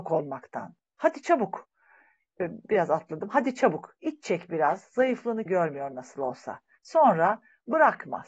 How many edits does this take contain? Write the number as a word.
one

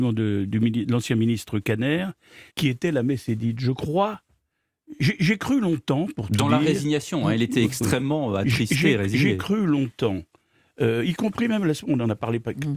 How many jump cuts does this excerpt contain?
one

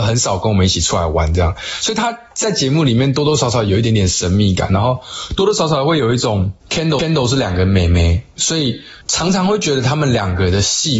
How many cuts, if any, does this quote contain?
three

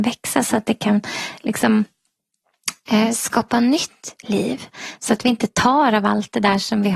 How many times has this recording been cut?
zero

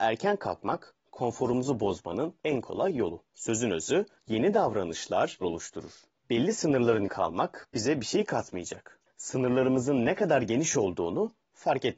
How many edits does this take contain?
three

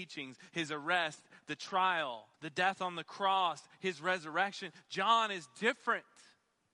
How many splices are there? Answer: one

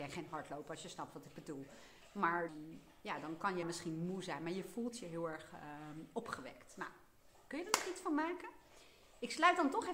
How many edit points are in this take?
two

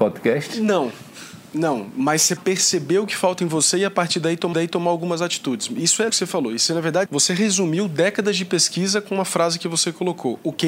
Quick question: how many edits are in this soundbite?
four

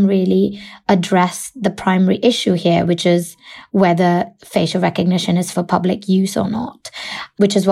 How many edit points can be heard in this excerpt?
one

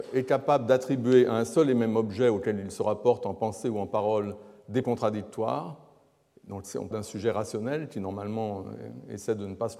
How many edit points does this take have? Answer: two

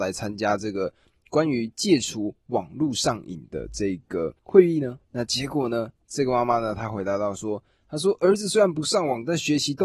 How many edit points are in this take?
two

